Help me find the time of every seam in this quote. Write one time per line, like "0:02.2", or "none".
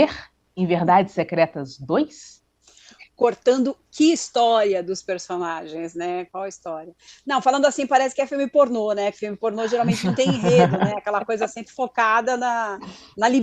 0:11.6

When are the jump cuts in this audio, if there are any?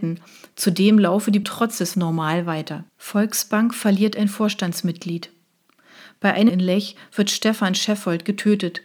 0:01.4
0:01.9
0:02.9
0:06.5

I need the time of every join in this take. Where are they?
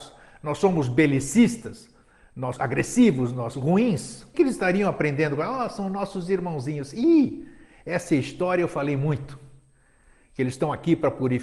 0:02.6
0:03.5
0:04.3

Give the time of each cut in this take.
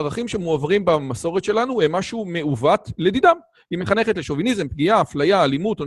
none

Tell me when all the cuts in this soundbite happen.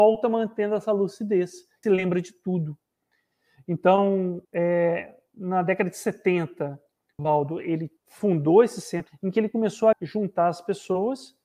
0:01.8
0:04.4
0:07.2
0:08.0
0:09.1
0:09.9

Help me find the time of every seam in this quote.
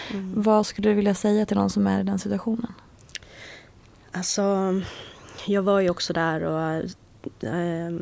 none

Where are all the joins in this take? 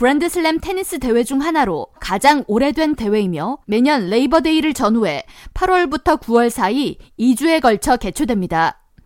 0:02.0
0:03.0
0:03.6

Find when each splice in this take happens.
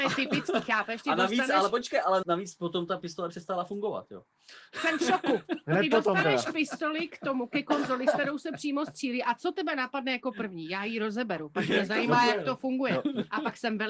0:02.2

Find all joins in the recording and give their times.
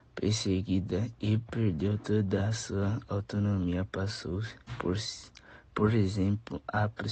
none

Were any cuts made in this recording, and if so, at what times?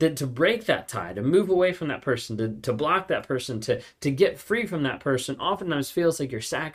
none

